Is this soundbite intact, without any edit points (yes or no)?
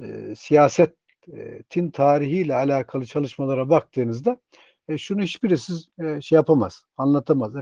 yes